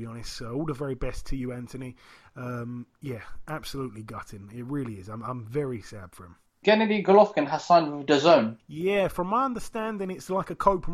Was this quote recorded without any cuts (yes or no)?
no